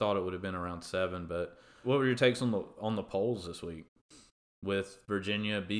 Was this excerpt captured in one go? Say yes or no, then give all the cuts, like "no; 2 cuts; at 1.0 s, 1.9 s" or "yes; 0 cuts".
no; 1 cut; at 1.8 s